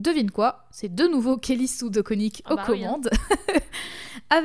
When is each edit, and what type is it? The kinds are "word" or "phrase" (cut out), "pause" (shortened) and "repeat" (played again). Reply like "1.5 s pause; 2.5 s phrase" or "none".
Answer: none